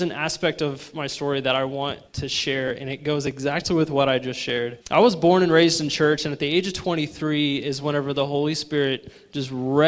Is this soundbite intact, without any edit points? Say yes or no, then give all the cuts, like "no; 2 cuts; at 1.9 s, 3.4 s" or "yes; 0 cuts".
no; 2 cuts; at 2.1 s, 4.8 s